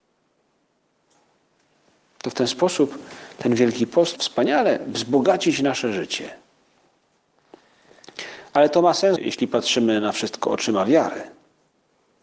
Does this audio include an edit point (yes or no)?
yes